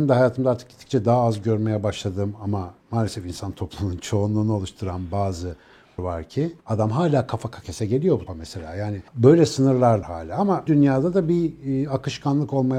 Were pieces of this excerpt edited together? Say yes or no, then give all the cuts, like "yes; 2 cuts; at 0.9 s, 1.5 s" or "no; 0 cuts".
yes; 8 cuts; at 2.8 s, 6.0 s, 6.6 s, 7.6 s, 8.3 s, 9.1 s, 10.0 s, 10.7 s